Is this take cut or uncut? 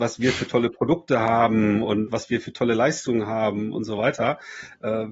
uncut